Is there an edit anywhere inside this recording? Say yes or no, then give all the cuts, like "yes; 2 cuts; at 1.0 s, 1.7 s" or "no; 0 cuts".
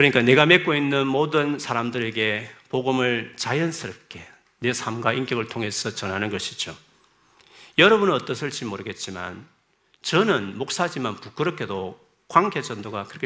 no; 0 cuts